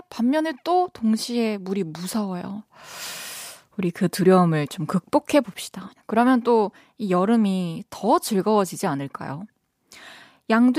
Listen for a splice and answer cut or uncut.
uncut